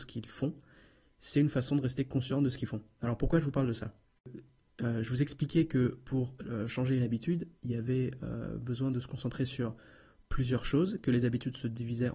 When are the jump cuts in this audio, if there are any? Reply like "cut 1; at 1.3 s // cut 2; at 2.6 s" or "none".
none

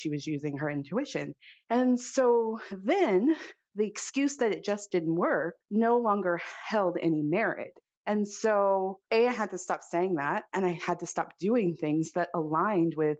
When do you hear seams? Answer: cut 1; at 1.6 s // cut 2; at 5.6 s // cut 3; at 7.8 s // cut 4; at 9.0 s

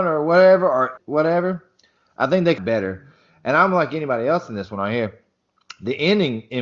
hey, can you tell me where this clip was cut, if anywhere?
cut 1; at 1.0 s // cut 2; at 2.6 s

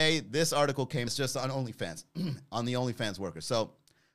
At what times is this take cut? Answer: cut 1; at 1.1 s

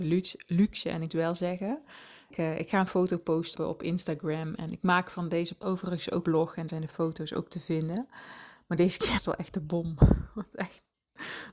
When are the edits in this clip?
cut 1; at 1.1 s // cut 2; at 2.3 s // cut 3; at 3.5 s // cut 4; at 5.6 s // cut 5; at 6.2 s // cut 6; at 6.7 s // cut 7; at 9.2 s

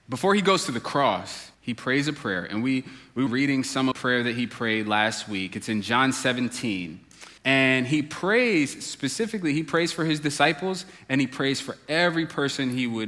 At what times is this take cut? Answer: cut 1; at 1.5 s // cut 2; at 3.3 s // cut 3; at 3.9 s // cut 4; at 7.4 s

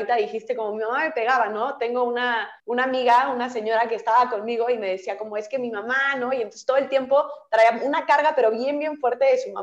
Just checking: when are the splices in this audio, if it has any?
cut 1; at 2.6 s

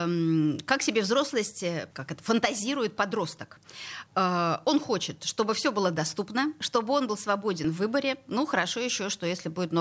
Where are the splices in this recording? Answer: cut 1; at 1.9 s // cut 2; at 4.1 s

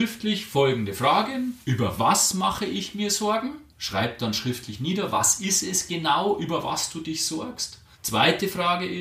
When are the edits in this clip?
cut 1; at 1.6 s // cut 2; at 3.7 s // cut 3; at 7.9 s

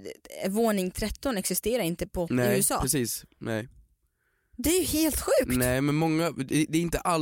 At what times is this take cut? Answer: cut 1; at 2.3 s

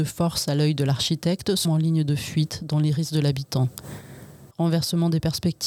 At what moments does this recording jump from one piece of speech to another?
cut 1; at 1.6 s // cut 2; at 4.5 s

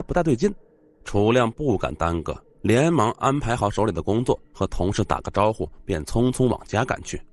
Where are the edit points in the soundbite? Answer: cut 1; at 2.5 s // cut 2; at 4.4 s

